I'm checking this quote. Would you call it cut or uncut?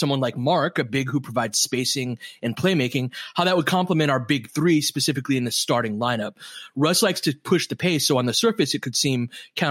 uncut